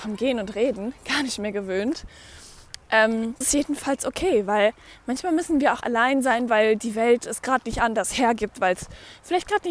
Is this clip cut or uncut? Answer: cut